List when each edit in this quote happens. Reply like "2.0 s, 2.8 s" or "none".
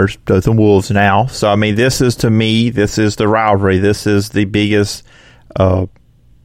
none